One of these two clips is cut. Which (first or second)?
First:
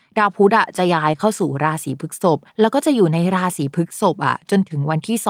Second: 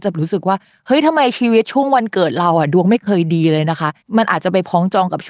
first